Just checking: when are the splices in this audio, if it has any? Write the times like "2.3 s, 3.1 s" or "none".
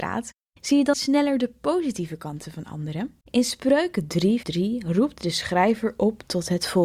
0.9 s, 3.2 s, 4.4 s